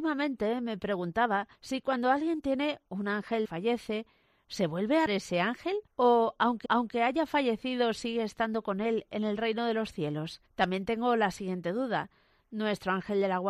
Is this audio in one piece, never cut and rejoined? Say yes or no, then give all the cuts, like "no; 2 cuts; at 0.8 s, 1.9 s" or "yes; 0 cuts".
no; 6 cuts; at 1.6 s, 3.4 s, 5.1 s, 5.9 s, 6.7 s, 10.5 s